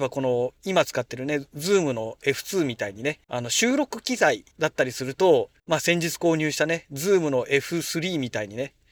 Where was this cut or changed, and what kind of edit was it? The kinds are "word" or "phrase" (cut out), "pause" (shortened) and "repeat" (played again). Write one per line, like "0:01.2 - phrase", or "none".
0:03.2 - pause
0:04.5 - pause
0:05.6 - pause